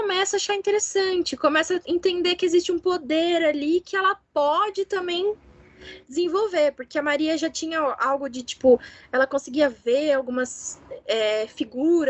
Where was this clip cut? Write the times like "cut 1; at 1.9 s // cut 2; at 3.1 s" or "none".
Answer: none